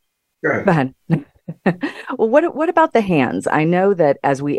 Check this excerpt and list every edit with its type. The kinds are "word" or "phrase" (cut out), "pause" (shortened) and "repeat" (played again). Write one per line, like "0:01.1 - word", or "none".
none